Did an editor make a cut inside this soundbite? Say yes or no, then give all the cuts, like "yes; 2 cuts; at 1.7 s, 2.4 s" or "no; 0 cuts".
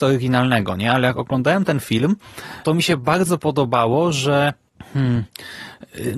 yes; 1 cut; at 2.6 s